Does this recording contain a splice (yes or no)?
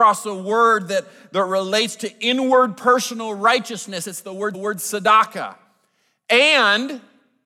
yes